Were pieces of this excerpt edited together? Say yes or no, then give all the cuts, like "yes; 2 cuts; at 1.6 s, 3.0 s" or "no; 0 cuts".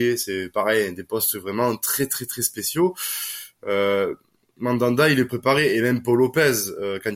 no; 0 cuts